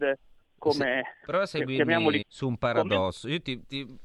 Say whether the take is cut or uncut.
cut